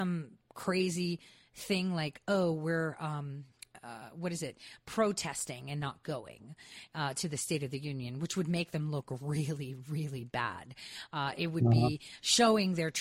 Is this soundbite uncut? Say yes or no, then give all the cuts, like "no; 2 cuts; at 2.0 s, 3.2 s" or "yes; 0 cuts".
yes; 0 cuts